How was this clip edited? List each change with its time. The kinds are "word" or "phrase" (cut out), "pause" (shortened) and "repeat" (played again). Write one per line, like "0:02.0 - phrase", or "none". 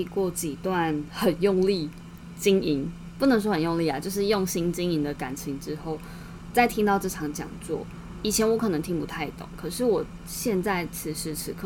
0:06.5 - word